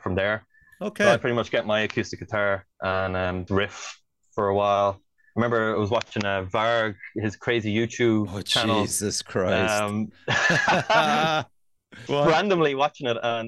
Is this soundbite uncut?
no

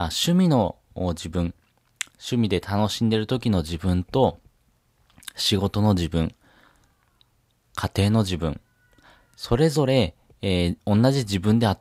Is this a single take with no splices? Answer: yes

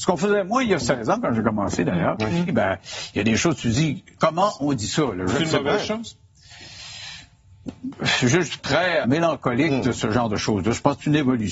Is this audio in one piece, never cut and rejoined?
no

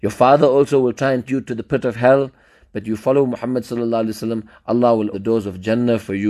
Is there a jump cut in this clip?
yes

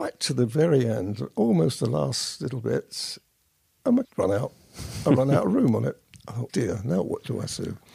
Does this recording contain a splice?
yes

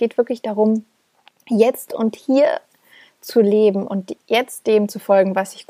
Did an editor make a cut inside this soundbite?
no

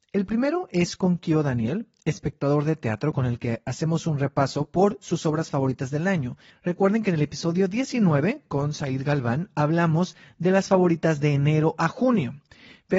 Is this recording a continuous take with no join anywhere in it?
yes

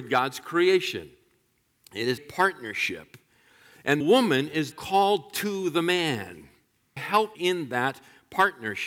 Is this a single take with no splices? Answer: no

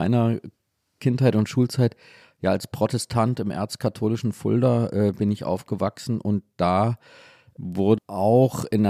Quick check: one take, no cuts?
no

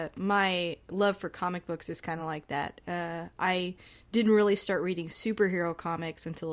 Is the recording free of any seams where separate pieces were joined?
yes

